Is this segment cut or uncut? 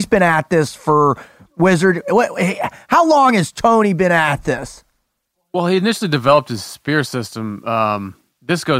uncut